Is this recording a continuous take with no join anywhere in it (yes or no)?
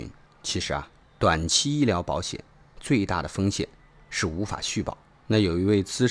yes